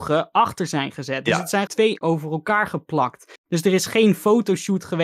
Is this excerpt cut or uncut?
cut